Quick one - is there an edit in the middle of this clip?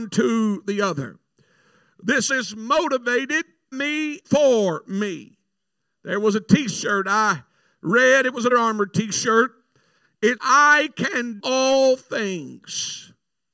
yes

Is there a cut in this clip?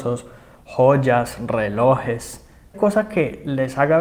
yes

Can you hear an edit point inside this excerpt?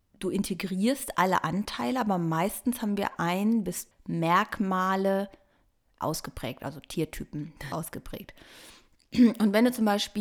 yes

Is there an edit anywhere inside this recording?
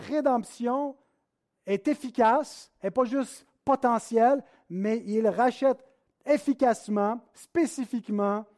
no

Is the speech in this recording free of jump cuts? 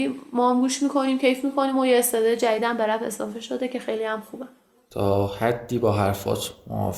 yes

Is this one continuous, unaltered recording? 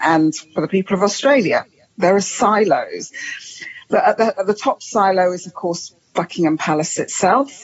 yes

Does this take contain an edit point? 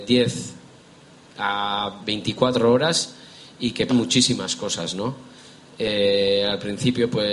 yes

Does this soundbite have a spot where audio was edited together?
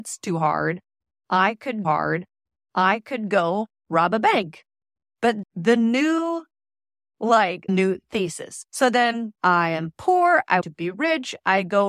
yes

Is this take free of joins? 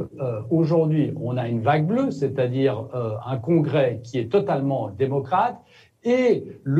yes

